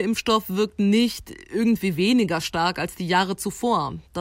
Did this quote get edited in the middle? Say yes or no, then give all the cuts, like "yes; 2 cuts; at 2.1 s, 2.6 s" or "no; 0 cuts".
no; 0 cuts